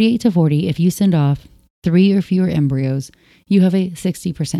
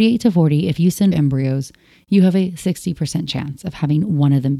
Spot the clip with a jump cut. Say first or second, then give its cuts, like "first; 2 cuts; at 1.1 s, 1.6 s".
second; 1 cut; at 1.1 s